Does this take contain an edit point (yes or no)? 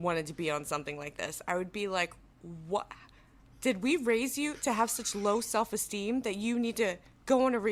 no